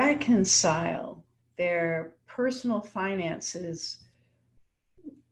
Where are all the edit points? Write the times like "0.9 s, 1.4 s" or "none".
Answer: 1.4 s